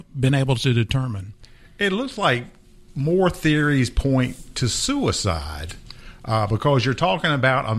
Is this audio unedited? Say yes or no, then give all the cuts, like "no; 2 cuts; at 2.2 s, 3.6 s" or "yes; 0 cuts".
yes; 0 cuts